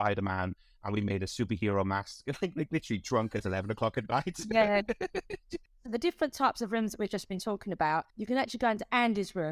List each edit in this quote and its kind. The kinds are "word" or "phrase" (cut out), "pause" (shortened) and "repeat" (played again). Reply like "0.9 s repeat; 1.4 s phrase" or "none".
8.1 s pause